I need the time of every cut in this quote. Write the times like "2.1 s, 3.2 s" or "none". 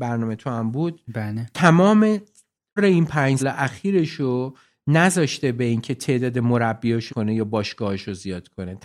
2.8 s, 3.4 s, 7.1 s